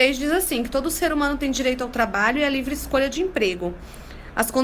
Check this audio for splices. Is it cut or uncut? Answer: uncut